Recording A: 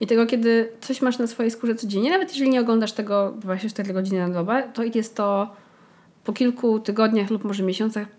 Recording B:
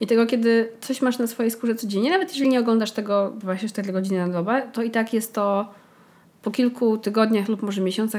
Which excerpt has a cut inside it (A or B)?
A